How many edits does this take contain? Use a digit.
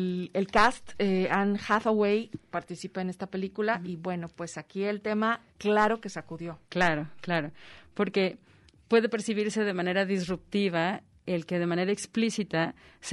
2